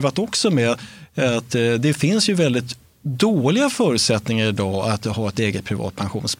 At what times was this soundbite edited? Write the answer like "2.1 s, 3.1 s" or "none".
none

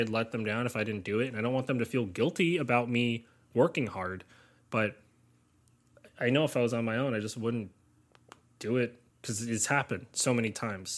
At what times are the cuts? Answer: 9.1 s

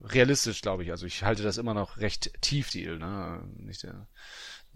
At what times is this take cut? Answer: 2.7 s

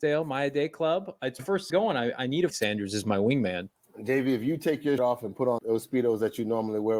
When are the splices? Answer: 1.4 s, 1.7 s, 2.5 s, 5.0 s, 5.6 s

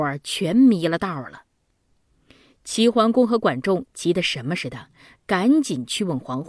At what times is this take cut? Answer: none

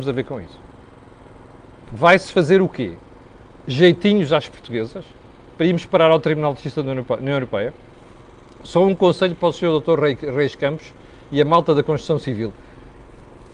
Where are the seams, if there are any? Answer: none

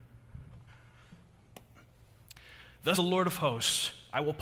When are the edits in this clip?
2.9 s

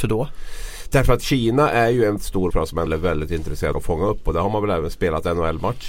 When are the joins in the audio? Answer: 2.2 s, 2.5 s, 2.9 s, 3.7 s

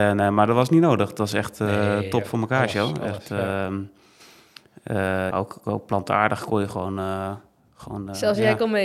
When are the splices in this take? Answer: 5.3 s

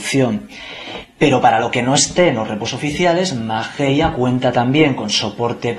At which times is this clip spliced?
none

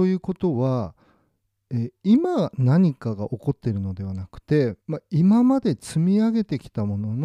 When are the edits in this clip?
4.8 s

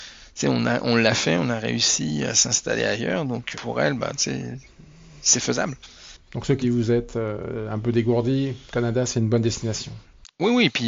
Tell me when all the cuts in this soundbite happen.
3.5 s, 6.2 s, 6.6 s

